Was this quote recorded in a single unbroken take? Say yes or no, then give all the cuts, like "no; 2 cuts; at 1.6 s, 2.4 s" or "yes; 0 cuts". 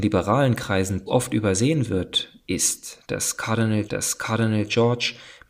no; 2 cuts; at 1.1 s, 3.9 s